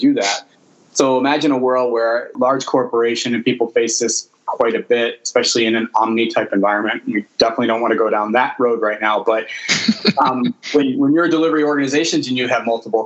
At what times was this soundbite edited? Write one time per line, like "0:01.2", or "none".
none